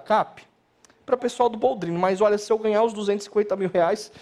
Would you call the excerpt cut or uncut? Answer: cut